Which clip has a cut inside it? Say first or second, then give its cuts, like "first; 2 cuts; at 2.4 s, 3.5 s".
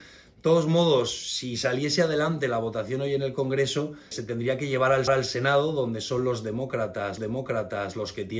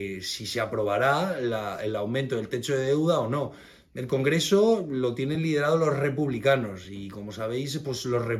first; 3 cuts; at 4.1 s, 5.1 s, 7.2 s